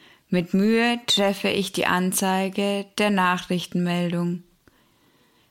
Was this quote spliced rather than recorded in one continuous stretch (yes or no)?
no